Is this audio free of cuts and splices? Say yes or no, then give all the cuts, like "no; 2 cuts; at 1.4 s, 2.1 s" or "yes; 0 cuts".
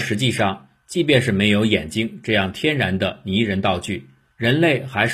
yes; 0 cuts